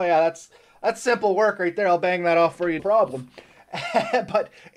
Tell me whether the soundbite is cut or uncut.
cut